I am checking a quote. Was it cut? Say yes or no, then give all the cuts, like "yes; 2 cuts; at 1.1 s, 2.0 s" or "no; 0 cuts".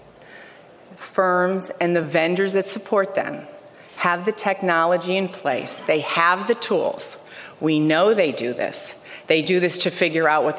no; 0 cuts